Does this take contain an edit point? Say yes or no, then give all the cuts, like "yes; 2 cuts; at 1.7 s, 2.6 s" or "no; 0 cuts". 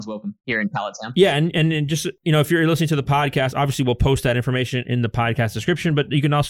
no; 0 cuts